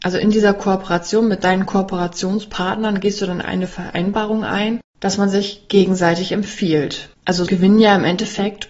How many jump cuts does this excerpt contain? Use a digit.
2